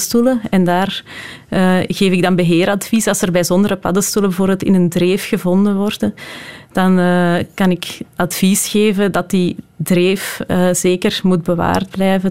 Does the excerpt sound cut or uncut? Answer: uncut